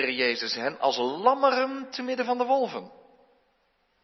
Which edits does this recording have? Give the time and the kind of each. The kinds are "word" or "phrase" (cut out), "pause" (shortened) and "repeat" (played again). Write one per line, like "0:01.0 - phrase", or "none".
none